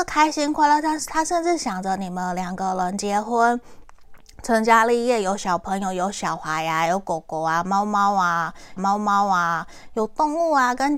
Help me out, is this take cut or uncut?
cut